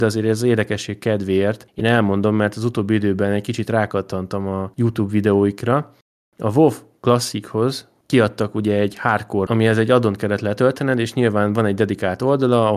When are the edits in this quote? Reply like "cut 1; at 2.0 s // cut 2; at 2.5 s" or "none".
cut 1; at 9.5 s